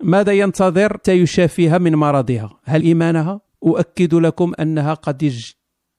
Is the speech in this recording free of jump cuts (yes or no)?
no